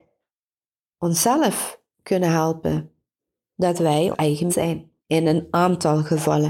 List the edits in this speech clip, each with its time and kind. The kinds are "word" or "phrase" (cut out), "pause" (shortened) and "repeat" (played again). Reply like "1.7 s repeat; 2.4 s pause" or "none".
3.2 s pause; 4.1 s word; 4.5 s word; 5.0 s pause